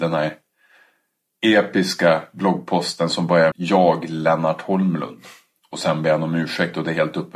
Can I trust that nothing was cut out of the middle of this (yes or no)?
no